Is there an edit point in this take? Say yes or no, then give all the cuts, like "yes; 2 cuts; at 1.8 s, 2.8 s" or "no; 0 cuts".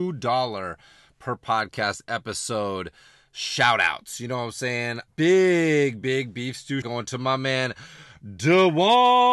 yes; 3 cuts; at 5.1 s, 6.0 s, 6.8 s